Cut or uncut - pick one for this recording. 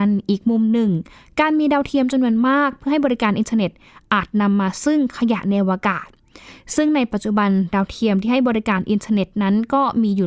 uncut